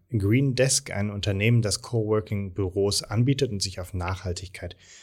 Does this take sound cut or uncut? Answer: uncut